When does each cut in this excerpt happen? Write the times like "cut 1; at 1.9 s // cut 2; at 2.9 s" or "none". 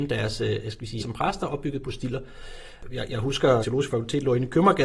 cut 1; at 1.0 s // cut 2; at 1.8 s // cut 3; at 3.6 s